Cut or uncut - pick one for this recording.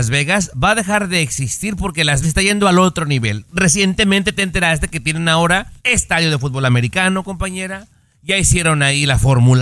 cut